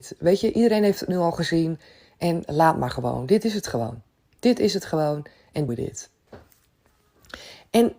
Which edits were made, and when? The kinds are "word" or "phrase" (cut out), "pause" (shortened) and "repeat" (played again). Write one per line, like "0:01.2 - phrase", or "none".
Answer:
0:05.7 - word